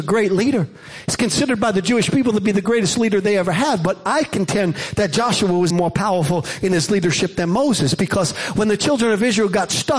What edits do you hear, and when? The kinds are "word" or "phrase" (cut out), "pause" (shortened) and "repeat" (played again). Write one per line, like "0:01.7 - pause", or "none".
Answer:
0:05.7 - word